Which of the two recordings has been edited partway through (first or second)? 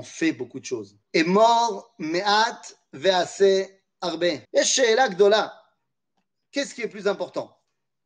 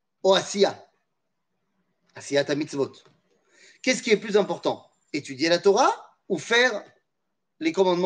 first